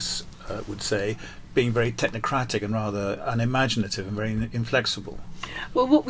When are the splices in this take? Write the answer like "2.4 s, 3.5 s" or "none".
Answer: none